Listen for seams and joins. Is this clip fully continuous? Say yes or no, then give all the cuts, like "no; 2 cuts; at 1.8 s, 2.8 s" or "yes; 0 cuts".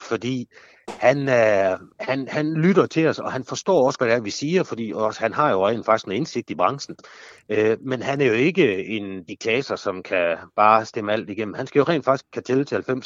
no; 2 cuts; at 1.9 s, 4.0 s